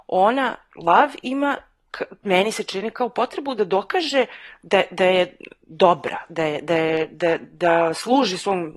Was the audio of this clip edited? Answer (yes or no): no